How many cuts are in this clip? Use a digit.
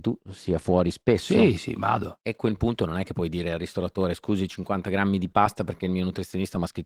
1